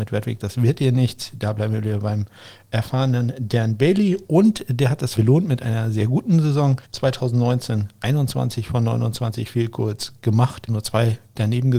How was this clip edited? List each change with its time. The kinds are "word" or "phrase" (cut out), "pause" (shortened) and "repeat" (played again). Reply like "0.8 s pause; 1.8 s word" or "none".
5.2 s word; 6.8 s pause; 10.7 s word